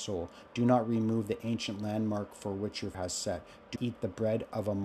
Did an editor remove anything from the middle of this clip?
yes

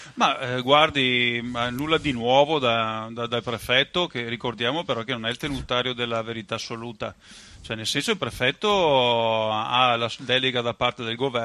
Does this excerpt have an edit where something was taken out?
no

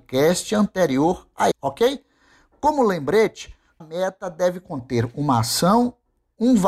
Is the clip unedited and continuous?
no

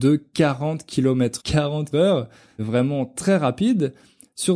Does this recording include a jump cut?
yes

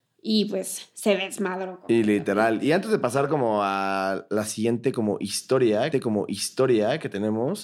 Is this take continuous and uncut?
no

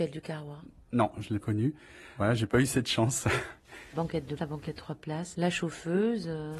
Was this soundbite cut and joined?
yes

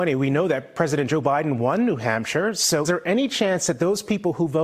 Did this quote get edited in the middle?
yes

